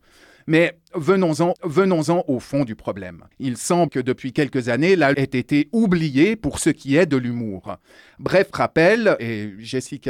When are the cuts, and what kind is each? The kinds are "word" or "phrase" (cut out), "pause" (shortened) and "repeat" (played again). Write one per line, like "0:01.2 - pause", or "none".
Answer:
0:01.6 - repeat
0:03.3 - pause
0:03.9 - phrase
0:05.1 - phrase
0:09.2 - word